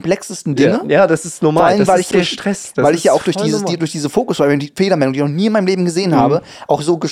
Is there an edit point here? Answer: yes; 1 cut; at 2.1 s

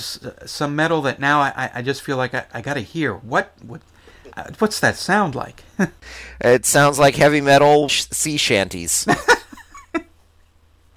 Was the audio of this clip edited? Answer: yes; 2 cuts; at 4.3 s, 7.9 s

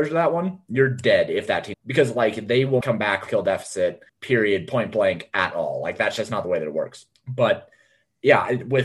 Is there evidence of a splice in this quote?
yes; 5 cuts; at 1.7 s, 2.8 s, 3.3 s, 4.1 s, 7.1 s

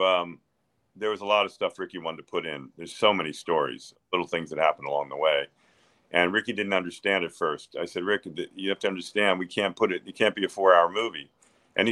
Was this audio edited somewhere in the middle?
no; 0 cuts

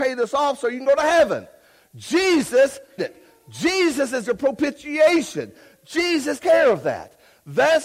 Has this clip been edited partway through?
yes; 2 cuts; at 3.0 s, 6.4 s

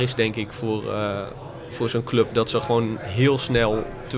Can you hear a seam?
no; 0 cuts

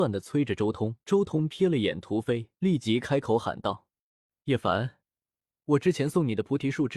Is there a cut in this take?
yes; 2 cuts; at 1.0 s, 2.6 s

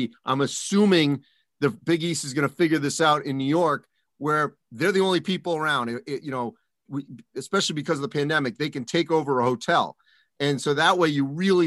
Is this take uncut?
yes; 0 cuts

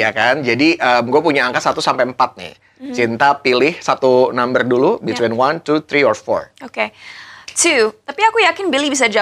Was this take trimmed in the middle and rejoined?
no; 0 cuts

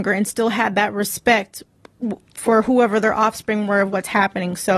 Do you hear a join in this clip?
no; 0 cuts

